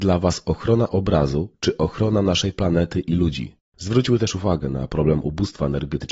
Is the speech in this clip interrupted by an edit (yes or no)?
yes